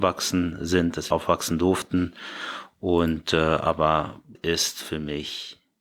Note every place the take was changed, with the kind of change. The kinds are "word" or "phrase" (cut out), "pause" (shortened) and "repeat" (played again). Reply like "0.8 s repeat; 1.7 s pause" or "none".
1.1 s word; 4.3 s word